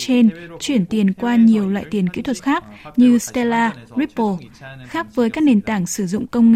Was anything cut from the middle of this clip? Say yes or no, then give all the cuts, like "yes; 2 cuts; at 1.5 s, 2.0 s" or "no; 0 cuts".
yes; 1 cut; at 2.4 s